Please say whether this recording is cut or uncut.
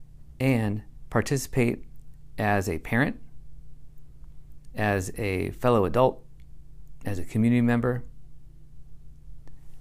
uncut